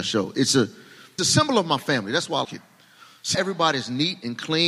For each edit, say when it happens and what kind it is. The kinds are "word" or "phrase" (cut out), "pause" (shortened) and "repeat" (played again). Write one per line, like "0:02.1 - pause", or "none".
0:01.2 - word
0:02.4 - word
0:03.3 - word